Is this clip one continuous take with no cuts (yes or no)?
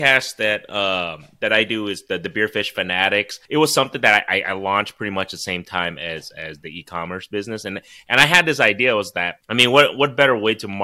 no